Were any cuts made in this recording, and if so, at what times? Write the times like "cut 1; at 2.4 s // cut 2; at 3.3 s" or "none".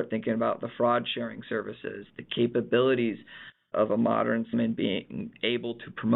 cut 1; at 3.7 s // cut 2; at 4.5 s